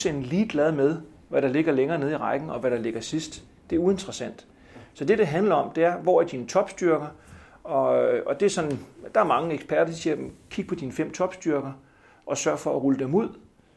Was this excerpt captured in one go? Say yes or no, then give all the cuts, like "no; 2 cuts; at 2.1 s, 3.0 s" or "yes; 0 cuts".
yes; 0 cuts